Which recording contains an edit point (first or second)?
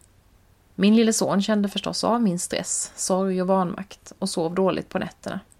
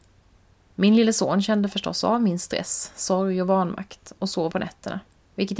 second